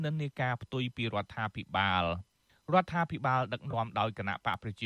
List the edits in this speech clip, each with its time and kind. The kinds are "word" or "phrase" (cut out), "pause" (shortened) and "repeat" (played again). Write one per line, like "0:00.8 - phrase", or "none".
none